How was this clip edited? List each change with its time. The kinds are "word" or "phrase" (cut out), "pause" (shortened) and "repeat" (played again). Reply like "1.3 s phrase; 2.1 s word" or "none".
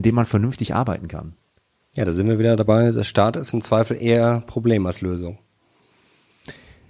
none